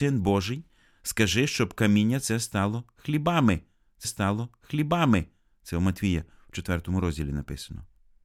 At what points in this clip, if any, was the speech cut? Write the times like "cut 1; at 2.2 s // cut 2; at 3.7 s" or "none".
cut 1; at 4.0 s